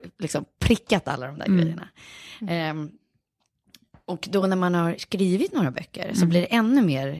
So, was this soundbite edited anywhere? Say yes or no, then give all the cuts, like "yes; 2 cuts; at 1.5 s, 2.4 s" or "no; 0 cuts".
no; 0 cuts